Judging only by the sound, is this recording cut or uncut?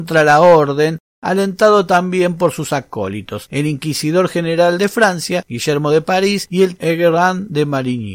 cut